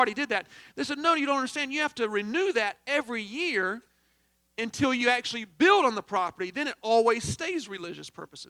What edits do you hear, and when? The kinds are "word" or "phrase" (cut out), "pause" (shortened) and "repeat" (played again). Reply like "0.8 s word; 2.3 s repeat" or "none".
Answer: none